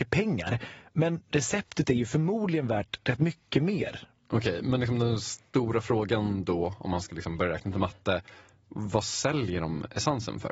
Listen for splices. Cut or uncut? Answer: uncut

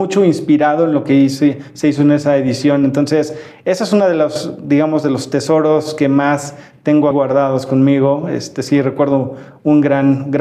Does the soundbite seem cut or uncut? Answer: cut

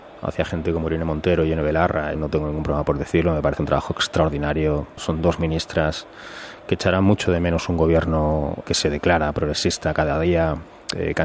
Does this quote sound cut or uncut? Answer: cut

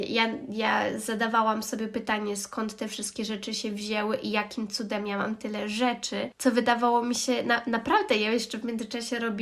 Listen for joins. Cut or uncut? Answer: uncut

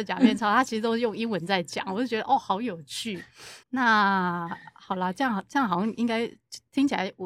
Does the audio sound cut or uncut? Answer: cut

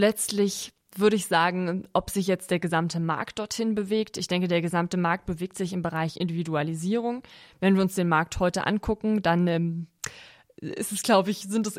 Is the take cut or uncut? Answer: uncut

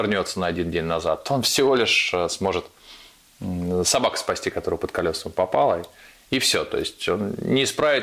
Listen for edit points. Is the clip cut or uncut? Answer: uncut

